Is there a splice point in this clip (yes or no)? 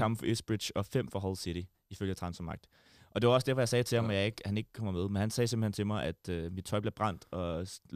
no